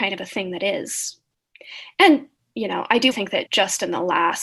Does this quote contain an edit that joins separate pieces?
yes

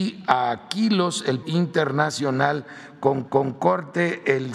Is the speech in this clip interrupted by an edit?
yes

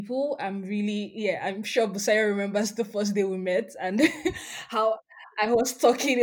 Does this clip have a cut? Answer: no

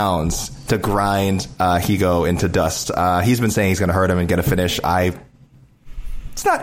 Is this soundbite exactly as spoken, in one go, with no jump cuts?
yes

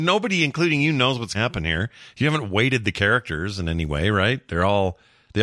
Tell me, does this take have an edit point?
yes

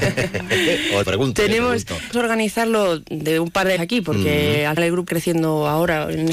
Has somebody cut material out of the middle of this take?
yes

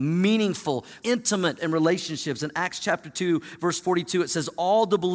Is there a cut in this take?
yes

